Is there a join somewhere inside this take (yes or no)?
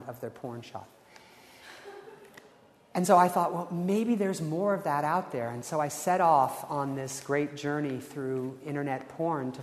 no